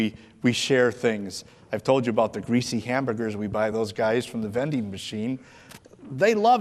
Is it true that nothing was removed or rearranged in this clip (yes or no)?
yes